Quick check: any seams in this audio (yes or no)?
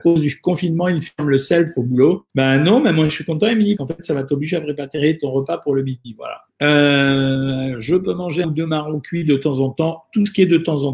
yes